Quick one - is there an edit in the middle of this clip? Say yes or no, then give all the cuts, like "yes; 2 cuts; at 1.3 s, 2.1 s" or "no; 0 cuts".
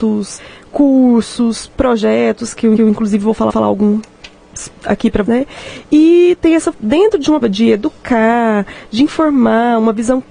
yes; 5 cuts; at 2.8 s, 3.5 s, 5.3 s, 6.7 s, 7.4 s